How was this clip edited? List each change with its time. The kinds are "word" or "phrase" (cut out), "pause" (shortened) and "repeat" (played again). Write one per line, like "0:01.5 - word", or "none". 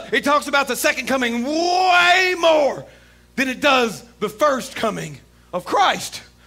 none